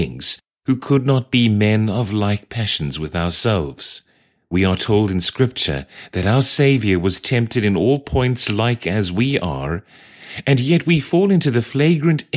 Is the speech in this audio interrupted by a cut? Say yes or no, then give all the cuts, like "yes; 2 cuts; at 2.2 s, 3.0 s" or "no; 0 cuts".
no; 0 cuts